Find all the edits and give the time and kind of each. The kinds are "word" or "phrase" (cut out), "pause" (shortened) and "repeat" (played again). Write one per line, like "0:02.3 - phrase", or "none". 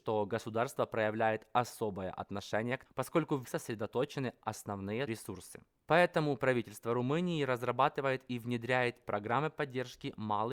0:02.9 - word
0:03.4 - word
0:05.1 - word
0:09.0 - word